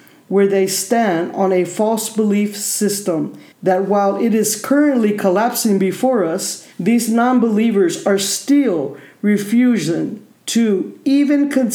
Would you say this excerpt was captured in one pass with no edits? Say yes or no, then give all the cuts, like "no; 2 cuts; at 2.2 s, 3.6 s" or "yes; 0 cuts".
no; 3 cuts; at 3.5 s, 6.7 s, 10.3 s